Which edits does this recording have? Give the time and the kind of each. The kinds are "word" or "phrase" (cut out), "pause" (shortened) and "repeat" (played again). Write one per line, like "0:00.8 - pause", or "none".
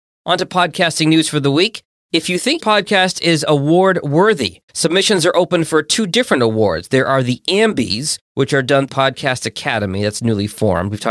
0:02.6 - word
0:04.7 - pause
0:08.9 - phrase